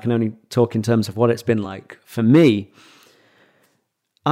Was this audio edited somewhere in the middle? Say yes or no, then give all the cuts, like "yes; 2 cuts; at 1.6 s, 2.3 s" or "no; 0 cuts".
no; 0 cuts